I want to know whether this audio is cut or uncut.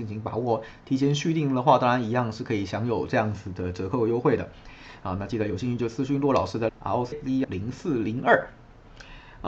cut